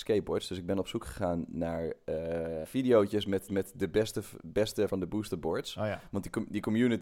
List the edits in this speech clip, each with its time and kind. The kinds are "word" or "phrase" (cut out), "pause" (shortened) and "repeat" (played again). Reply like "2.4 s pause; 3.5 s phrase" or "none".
2.6 s word; 3.5 s repeat; 4.9 s word